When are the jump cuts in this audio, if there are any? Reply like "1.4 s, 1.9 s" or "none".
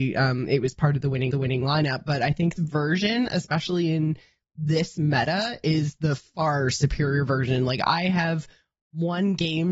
1.3 s, 2.6 s